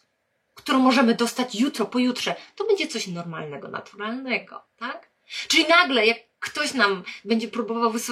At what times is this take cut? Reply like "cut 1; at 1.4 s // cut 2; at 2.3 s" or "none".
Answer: cut 1; at 4.7 s